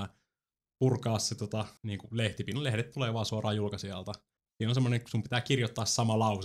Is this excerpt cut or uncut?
cut